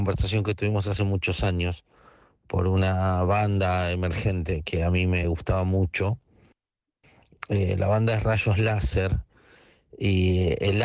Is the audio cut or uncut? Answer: uncut